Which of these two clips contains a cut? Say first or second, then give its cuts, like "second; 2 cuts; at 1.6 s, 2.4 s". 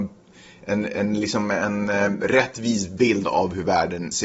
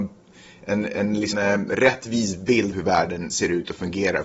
second; 2 cuts; at 1.3 s, 2.7 s